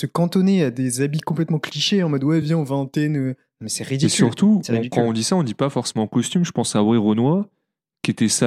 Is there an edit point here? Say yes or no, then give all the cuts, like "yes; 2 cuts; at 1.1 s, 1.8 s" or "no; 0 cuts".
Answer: no; 0 cuts